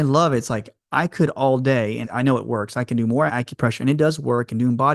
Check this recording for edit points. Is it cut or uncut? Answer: cut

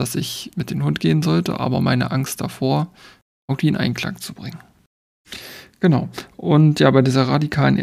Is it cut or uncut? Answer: uncut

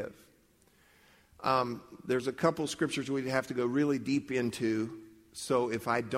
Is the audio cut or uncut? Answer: uncut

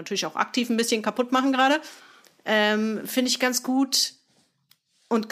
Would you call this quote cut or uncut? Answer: uncut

